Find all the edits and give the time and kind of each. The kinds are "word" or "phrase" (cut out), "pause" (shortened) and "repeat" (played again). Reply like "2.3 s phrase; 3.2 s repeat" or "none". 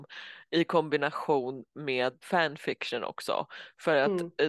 2.2 s word